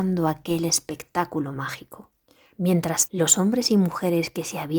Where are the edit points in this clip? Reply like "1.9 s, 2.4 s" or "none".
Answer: 3.1 s